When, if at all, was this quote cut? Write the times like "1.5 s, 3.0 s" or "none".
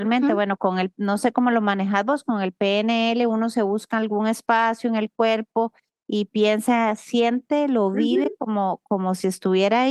none